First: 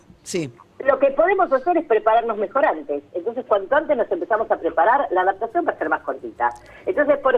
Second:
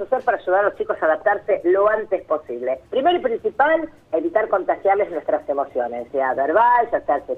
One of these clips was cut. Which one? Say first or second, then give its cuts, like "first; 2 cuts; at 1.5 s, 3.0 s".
second; 2 cuts; at 2.9 s, 6.1 s